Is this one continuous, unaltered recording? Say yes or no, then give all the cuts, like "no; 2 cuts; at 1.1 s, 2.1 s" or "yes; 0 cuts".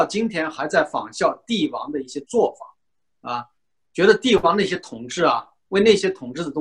yes; 0 cuts